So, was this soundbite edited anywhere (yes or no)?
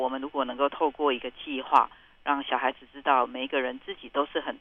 no